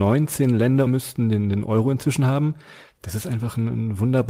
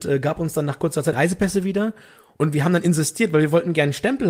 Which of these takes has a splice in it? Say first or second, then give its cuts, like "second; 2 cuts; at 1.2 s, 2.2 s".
second; 1 cut; at 1.1 s